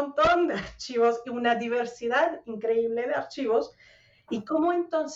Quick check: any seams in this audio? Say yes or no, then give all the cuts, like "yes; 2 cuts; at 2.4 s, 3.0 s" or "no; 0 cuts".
no; 0 cuts